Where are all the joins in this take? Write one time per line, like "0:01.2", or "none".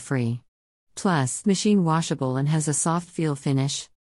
0:01.4